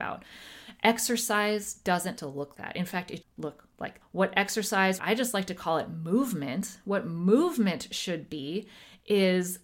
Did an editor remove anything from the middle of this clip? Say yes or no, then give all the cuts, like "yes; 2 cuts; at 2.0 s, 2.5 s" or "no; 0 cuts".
yes; 5 cuts; at 2.2 s, 2.5 s, 3.2 s, 4.0 s, 5.0 s